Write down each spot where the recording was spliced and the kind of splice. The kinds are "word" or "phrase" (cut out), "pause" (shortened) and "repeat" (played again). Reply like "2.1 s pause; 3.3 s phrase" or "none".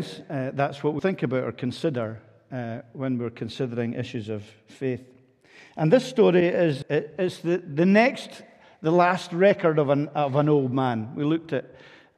1.0 s word; 6.8 s word